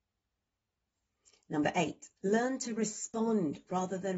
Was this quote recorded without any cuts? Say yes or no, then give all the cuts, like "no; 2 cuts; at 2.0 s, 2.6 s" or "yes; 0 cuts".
no; 1 cut; at 2.2 s